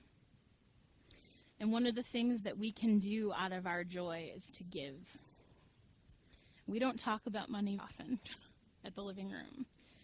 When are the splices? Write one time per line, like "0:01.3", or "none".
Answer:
0:01.5
0:07.8